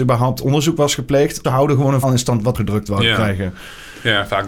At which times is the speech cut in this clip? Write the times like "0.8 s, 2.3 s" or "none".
1.4 s, 2.0 s, 2.5 s